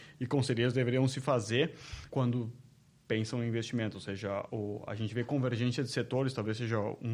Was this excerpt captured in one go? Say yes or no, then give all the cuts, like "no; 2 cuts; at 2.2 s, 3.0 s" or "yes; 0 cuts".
no; 1 cut; at 2.1 s